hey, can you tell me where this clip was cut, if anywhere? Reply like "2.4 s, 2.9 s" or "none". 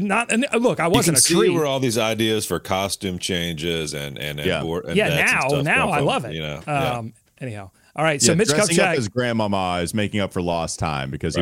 none